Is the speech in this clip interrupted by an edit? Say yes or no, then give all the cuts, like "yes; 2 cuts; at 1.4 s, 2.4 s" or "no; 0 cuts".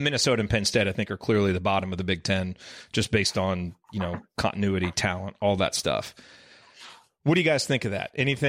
no; 0 cuts